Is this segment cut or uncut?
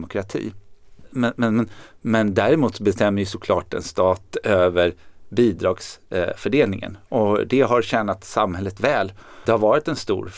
cut